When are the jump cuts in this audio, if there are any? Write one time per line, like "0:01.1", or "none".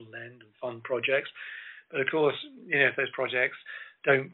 none